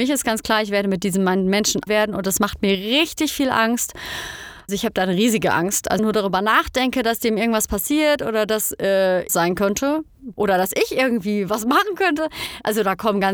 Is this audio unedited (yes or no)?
no